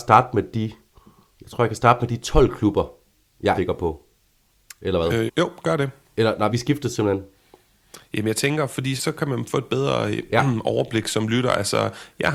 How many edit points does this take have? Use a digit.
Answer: 4